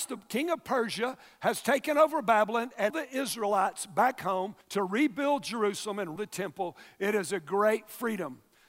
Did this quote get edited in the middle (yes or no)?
yes